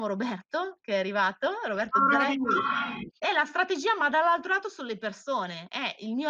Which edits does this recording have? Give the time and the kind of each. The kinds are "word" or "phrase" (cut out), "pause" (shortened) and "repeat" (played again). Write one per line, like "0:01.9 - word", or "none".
0:03.2 - pause